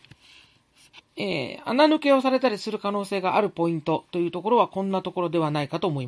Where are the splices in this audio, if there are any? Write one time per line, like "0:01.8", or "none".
0:01.1